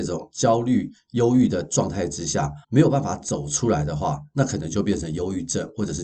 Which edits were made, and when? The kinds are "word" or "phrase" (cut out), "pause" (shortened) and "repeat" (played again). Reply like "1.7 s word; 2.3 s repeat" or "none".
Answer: 2.6 s pause